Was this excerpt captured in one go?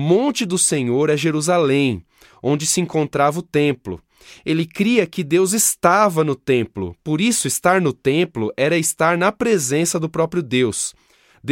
yes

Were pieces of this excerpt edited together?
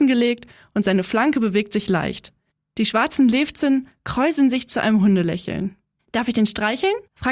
no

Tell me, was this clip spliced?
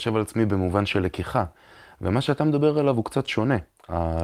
no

